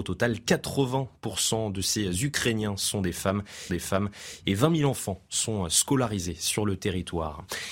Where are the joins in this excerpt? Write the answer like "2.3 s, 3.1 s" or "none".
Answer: 3.7 s